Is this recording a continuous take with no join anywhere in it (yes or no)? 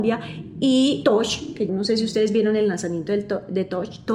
no